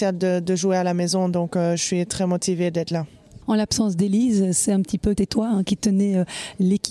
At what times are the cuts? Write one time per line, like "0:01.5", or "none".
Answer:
0:03.4
0:05.1